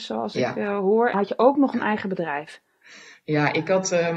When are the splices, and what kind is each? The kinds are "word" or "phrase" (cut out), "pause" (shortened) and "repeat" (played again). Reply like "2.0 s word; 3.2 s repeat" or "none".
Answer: 1.1 s word